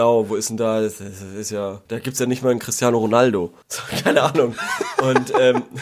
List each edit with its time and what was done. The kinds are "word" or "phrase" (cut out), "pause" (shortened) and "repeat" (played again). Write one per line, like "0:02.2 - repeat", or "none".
0:01.9 - pause
0:03.6 - pause

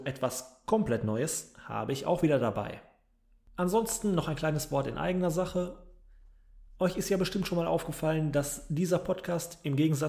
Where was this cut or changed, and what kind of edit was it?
none

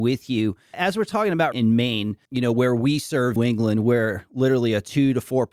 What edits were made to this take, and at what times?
0:01.5 - phrase
0:03.4 - phrase

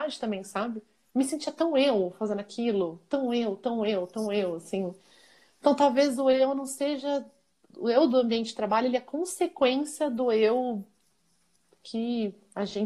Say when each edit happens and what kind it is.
0:07.7 - word

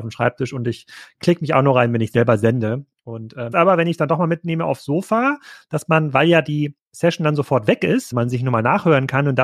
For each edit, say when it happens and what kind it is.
0:03.5 - word
0:08.1 - word

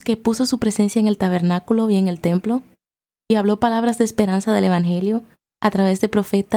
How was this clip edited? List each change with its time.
none

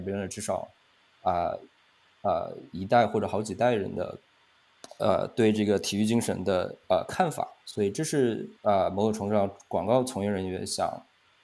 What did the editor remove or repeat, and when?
0:07.6 - pause
0:08.5 - pause

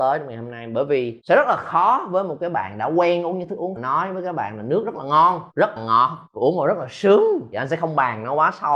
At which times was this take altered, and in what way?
0:03.8 - phrase
0:05.8 - word

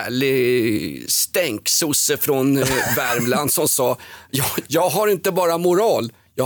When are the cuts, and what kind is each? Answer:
none

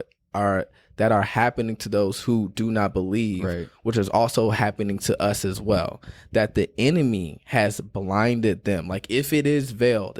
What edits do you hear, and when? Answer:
none

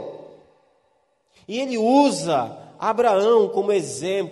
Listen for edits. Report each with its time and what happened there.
none

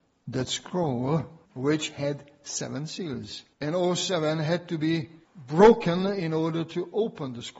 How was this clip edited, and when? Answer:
0:01.4 - pause
0:03.5 - pause
0:05.2 - pause

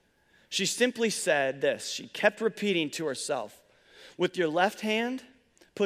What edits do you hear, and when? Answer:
none

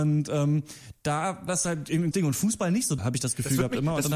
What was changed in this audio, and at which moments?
0:01.5 - word
0:02.1 - word
0:03.0 - word

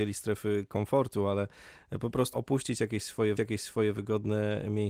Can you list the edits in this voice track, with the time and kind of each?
0:02.3 - word
0:03.4 - repeat

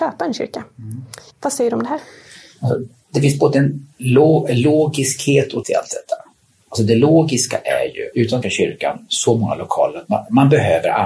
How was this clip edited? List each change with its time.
0:01.3 - pause
0:03.9 - pause
0:05.6 - word
0:08.1 - word
0:08.4 - phrase

